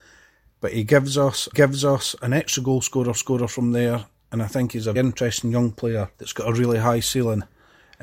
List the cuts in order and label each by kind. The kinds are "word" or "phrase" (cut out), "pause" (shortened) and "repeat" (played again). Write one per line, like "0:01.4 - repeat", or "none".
0:01.5 - repeat
0:03.1 - repeat
0:04.9 - word
0:06.1 - pause